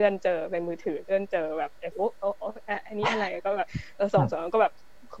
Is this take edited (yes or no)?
yes